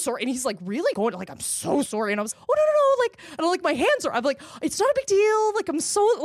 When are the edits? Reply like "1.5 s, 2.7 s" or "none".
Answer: 0.9 s, 1.9 s, 2.3 s